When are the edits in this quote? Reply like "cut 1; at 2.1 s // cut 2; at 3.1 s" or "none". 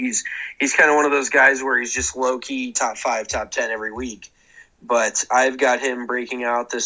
none